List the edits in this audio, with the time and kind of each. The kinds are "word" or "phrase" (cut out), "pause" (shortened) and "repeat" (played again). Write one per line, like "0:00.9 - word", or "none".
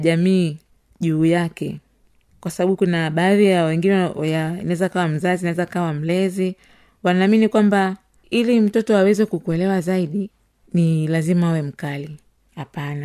none